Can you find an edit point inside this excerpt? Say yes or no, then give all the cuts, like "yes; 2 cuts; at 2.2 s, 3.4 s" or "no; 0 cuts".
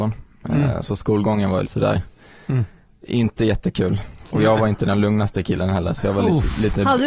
yes; 1 cut; at 1.6 s